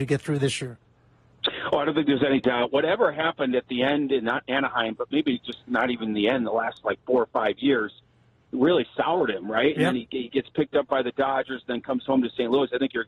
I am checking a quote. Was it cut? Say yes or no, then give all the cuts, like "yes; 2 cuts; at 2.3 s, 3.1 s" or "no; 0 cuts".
no; 0 cuts